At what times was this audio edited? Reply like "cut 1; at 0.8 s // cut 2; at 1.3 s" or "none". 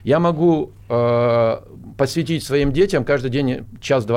none